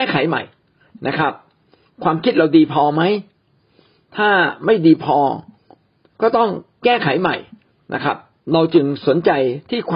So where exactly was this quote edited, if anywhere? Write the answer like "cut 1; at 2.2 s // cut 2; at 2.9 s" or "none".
none